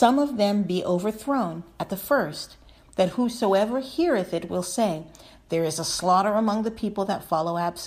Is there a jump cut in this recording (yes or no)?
no